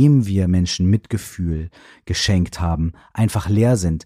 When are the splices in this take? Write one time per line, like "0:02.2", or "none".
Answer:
none